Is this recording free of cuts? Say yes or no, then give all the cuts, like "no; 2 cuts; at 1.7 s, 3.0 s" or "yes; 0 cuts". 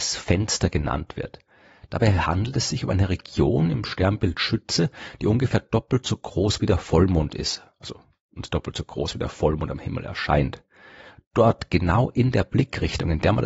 yes; 0 cuts